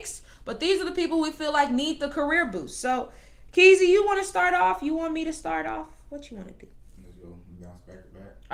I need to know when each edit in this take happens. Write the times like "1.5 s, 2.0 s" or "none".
none